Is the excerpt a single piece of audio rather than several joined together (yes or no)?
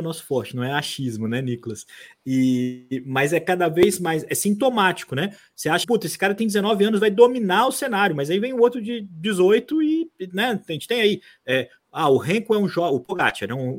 no